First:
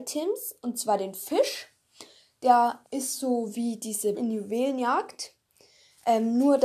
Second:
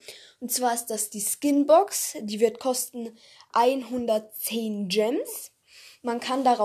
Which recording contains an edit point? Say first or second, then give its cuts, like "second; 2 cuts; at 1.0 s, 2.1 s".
first; 2 cuts; at 2.8 s, 4.1 s